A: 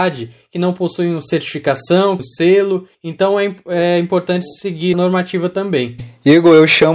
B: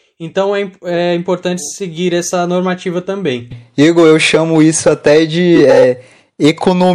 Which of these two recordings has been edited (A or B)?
A